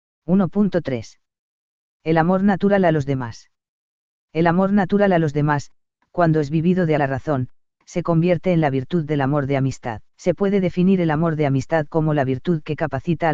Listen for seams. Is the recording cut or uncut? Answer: cut